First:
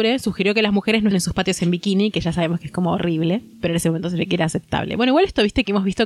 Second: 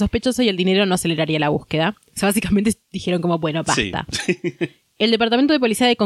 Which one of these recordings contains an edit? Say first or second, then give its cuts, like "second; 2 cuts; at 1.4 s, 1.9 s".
first; 2 cuts; at 1.1 s, 3.5 s